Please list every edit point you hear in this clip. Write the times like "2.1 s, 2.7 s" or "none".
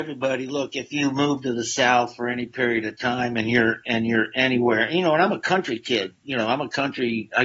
none

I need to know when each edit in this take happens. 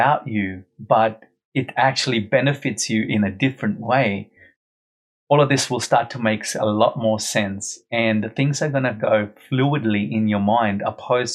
none

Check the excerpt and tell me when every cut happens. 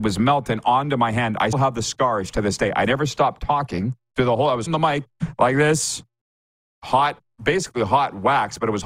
1.5 s, 4.7 s

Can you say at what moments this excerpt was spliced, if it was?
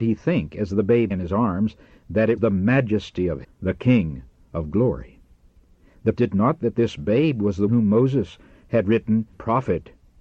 1.1 s, 2.4 s, 3.4 s, 6.2 s, 6.6 s, 7.7 s, 9.3 s

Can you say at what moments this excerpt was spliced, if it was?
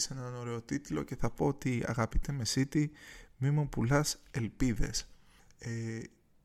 none

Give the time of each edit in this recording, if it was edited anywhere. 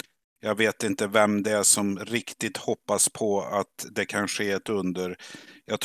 none

